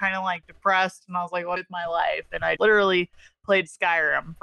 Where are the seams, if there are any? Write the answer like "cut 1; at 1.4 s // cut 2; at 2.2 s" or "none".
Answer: cut 1; at 1.6 s // cut 2; at 2.6 s

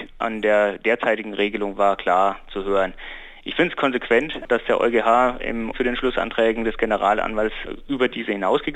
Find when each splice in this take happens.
cut 1; at 5.7 s

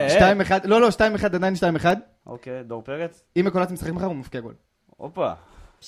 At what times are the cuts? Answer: none

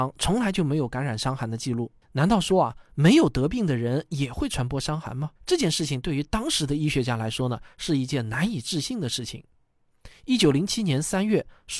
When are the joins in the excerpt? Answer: cut 1; at 2.0 s // cut 2; at 5.4 s

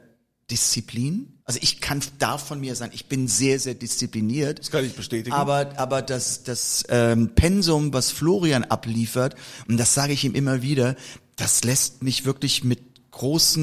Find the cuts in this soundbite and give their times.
cut 1; at 1.4 s

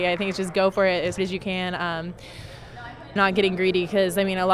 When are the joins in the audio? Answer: cut 1; at 1.2 s // cut 2; at 3.2 s

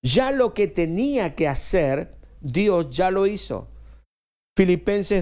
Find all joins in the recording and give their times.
none

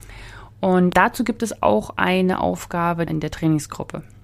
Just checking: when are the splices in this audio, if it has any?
cut 1; at 3.1 s

